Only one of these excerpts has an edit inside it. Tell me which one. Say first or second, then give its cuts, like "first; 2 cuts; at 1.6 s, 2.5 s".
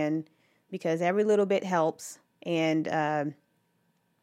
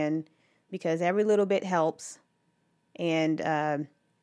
first; 1 cut; at 2.3 s